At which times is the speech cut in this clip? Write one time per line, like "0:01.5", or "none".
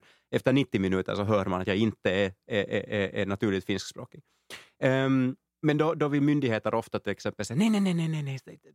0:05.5